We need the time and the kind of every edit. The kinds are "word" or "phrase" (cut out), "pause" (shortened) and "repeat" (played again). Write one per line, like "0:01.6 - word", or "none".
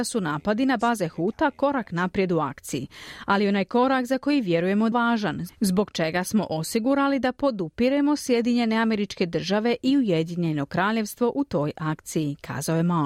0:04.9 - phrase